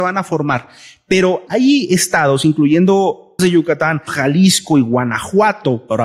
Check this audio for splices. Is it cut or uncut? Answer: cut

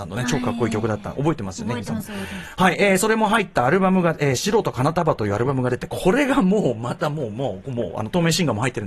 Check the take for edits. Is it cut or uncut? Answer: cut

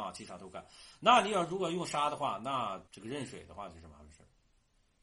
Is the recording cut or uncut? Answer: cut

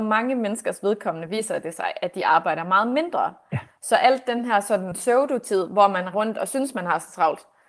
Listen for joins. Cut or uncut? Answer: cut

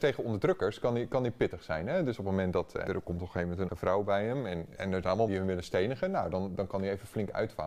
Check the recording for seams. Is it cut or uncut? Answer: cut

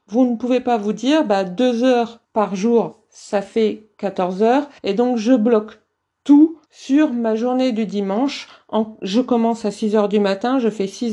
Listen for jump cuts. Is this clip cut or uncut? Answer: cut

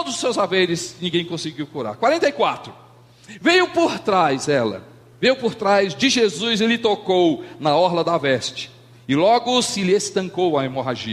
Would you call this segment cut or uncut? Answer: uncut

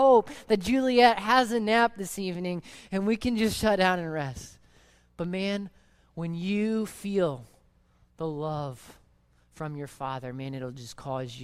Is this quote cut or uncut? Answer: uncut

